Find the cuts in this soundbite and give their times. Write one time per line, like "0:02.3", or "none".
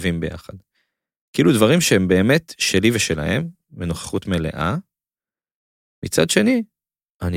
none